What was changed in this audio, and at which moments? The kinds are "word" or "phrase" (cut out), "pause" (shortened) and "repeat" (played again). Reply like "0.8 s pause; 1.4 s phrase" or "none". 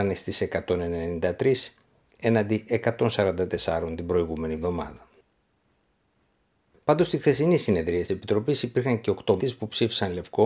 8.1 s word; 9.4 s word